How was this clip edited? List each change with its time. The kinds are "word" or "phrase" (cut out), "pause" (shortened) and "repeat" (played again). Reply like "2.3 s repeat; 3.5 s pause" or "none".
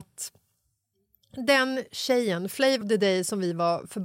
2.8 s word